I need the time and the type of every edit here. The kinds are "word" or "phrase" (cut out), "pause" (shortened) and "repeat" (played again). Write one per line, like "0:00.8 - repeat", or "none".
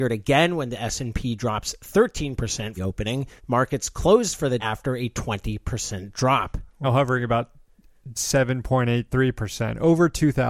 0:02.8 - phrase
0:03.4 - pause
0:04.6 - word
0:06.8 - word
0:08.2 - word